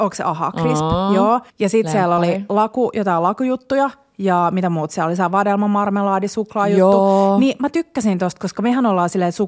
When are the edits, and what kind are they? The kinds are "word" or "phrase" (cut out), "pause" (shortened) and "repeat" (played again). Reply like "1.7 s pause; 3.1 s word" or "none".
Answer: 1.5 s pause

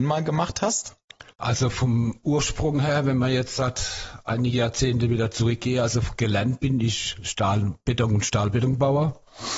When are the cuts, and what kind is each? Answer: 1.3 s pause

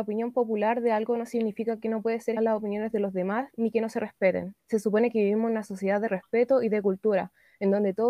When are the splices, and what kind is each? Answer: 2.4 s word; 4.6 s pause

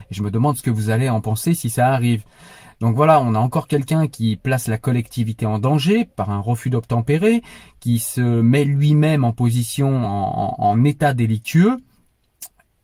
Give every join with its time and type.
none

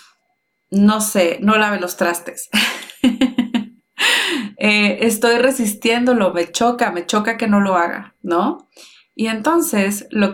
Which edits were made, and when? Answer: none

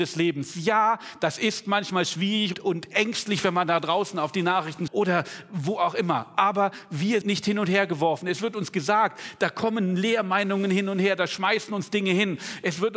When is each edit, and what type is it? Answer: 2.5 s word; 4.9 s word; 7.2 s word

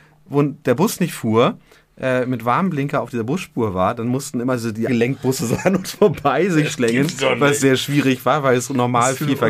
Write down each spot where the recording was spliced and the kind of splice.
4.9 s word

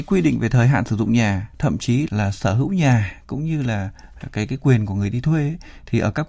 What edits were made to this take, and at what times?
2.1 s word

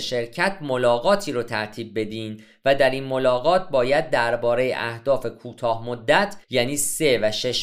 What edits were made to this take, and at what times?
6.4 s pause

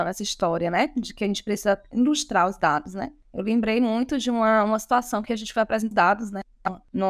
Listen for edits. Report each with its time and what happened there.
5.9 s word

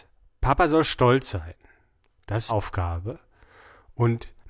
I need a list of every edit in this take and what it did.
2.5 s phrase

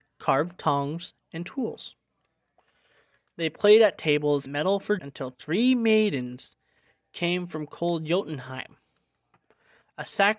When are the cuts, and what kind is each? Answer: 4.5 s word; 5.0 s word

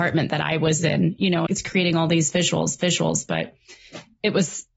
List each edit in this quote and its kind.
1.5 s word; 2.8 s repeat

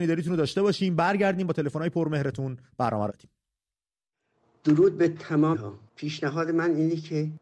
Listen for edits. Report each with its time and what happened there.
3.1 s word; 5.5 s word; 5.9 s pause

